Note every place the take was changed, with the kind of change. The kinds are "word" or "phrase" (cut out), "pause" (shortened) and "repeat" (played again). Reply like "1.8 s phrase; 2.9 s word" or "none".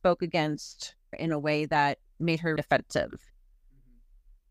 1.1 s word; 2.6 s word

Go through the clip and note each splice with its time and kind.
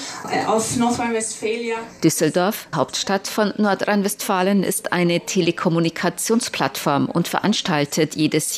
2.7 s word

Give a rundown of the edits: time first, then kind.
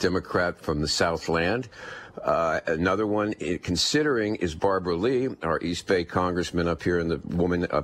none

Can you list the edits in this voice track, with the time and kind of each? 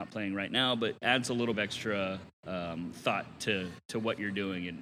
1.0 s phrase; 1.5 s word; 2.3 s pause

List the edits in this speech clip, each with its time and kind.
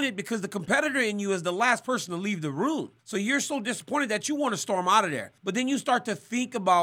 3.0 s pause; 5.4 s pause

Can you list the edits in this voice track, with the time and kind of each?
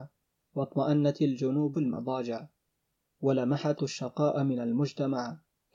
1.7 s word; 3.8 s word

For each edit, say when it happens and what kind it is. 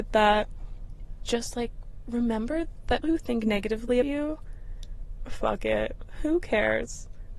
1.3 s word; 3.0 s word; 4.0 s word; 5.3 s word

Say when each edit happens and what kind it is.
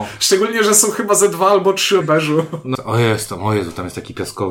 2.0 s word; 2.7 s word

